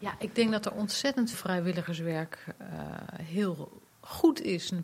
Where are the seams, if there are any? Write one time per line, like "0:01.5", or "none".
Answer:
0:01.3